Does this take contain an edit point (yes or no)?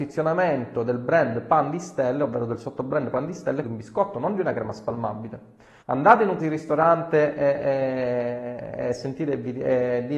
yes